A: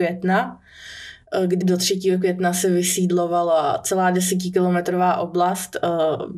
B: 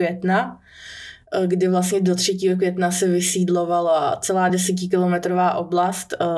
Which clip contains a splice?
A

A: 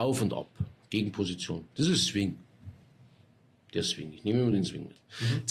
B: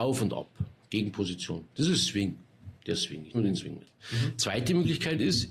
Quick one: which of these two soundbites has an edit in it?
B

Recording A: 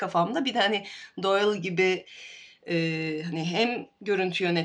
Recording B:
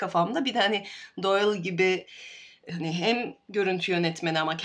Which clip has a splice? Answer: B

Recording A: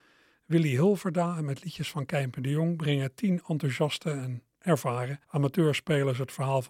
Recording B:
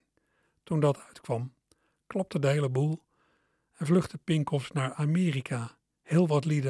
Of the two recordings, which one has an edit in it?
A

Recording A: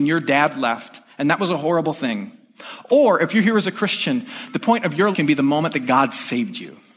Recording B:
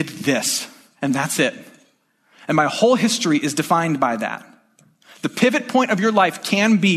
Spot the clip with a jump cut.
A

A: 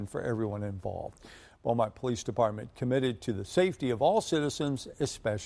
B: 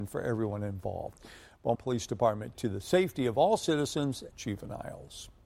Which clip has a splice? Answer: B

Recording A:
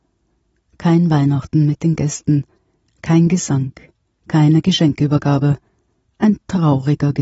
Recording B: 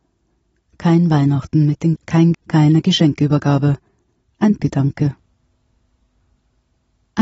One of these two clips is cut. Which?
B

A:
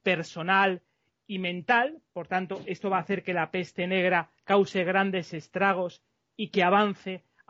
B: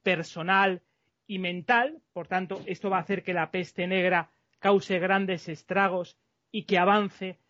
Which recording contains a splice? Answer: A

